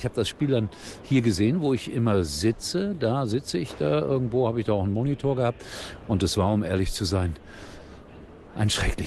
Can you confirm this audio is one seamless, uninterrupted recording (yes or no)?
yes